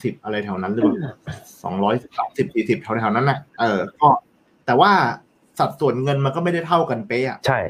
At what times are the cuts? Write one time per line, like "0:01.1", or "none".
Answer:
0:03.5